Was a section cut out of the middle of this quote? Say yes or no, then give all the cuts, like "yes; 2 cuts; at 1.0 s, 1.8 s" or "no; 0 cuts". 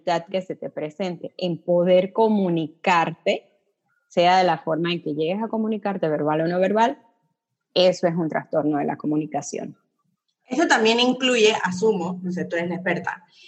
no; 0 cuts